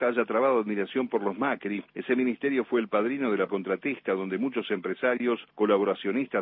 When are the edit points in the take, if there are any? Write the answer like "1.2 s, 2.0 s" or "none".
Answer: 1.9 s, 3.5 s, 5.5 s